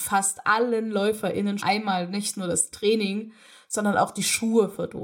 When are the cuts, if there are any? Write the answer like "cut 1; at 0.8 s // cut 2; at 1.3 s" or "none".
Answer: cut 1; at 1.6 s